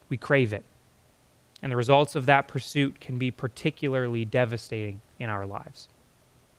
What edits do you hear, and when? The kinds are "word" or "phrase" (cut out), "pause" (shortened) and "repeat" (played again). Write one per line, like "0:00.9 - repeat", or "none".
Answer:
0:01.1 - pause
0:05.1 - pause